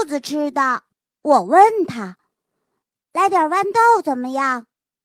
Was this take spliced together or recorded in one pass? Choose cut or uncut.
cut